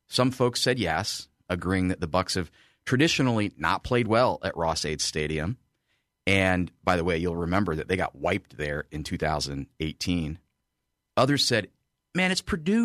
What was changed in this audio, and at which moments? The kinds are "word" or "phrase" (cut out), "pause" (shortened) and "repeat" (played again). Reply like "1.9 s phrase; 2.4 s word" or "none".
none